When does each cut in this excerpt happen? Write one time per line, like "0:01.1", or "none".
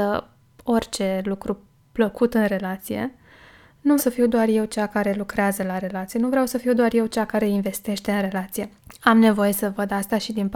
0:04.0
0:08.8

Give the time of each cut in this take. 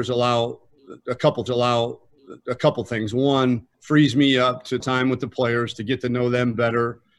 0:01.5
0:03.7
0:04.8

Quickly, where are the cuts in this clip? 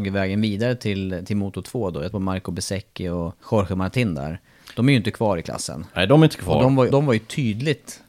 0:02.1
0:03.4
0:06.9

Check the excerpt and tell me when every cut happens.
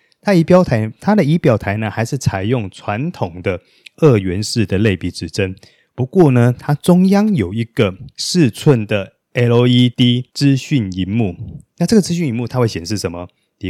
none

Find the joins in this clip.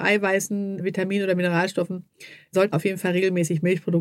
0:02.7

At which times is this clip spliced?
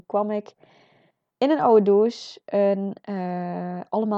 none

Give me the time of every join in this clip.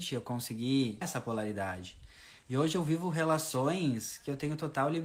0:01.0

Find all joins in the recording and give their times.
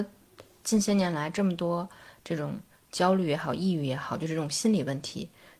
none

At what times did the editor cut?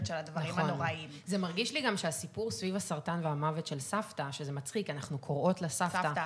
none

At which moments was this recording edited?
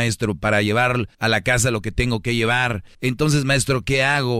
0:01.1
0:02.9

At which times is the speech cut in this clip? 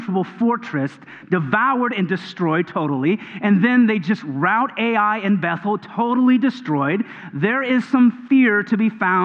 none

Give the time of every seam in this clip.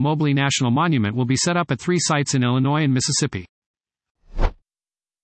none

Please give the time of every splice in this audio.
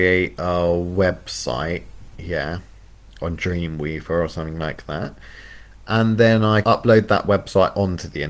0:06.6

